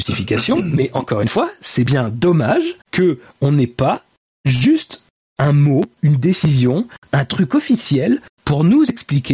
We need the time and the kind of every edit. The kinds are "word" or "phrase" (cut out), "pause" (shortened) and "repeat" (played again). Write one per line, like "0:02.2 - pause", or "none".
0:02.8 - pause